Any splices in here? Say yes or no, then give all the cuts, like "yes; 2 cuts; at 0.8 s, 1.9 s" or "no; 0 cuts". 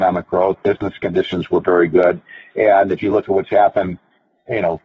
no; 0 cuts